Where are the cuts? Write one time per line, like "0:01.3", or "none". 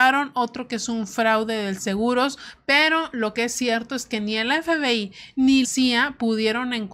0:05.6